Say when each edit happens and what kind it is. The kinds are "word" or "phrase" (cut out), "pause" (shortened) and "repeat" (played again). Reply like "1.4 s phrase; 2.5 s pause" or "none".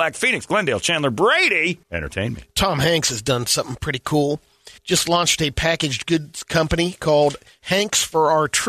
1.8 s pause; 4.8 s pause